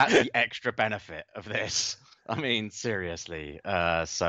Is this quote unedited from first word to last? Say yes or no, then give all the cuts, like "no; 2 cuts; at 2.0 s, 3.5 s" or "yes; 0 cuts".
yes; 0 cuts